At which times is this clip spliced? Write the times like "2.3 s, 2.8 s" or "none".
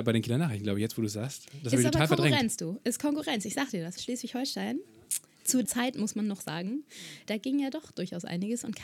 4.0 s, 5.6 s, 7.3 s